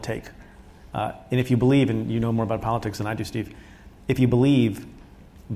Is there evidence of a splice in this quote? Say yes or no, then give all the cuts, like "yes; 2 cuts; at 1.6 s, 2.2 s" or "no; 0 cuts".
no; 0 cuts